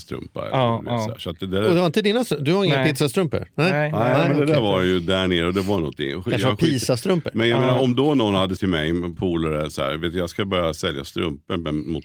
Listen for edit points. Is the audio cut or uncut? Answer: cut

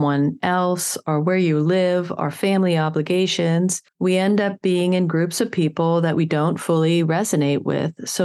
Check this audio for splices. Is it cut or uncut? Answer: uncut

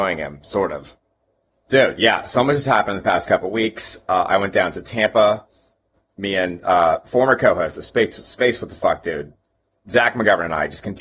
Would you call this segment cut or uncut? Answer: uncut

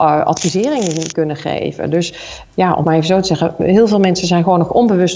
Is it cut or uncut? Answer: cut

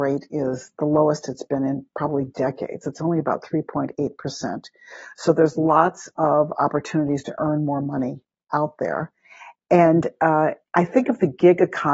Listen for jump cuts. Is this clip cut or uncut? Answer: uncut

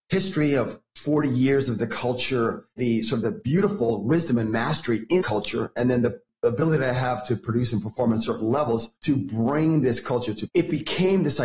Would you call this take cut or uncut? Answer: cut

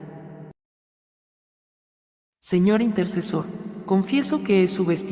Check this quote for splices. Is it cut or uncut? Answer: uncut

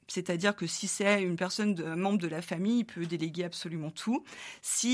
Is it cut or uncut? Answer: uncut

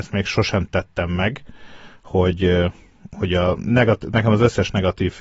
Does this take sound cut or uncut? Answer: uncut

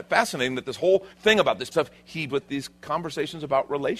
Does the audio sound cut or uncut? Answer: cut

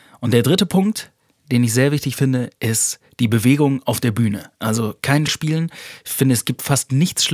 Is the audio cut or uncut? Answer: cut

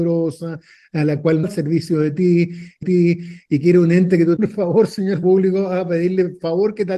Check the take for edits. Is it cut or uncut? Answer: cut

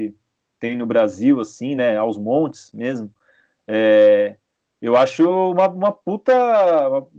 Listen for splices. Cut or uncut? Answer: uncut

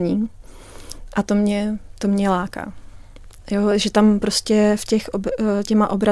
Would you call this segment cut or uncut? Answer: uncut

